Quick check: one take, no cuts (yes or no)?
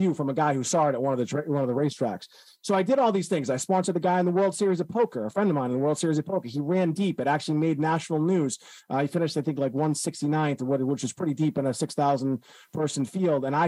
yes